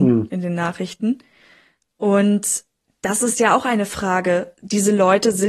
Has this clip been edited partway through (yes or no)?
no